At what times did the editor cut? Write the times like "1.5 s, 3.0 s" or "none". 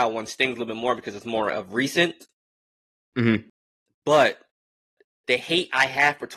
none